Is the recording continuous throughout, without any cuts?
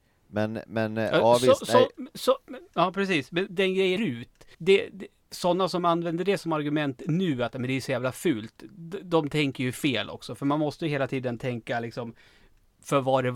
no; 3 cuts; at 3.5 s, 4.0 s, 4.5 s

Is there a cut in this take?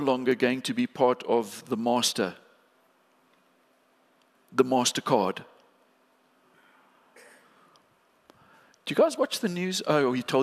no; 0 cuts

